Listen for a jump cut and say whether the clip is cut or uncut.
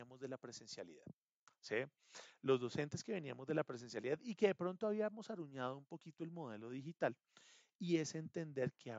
uncut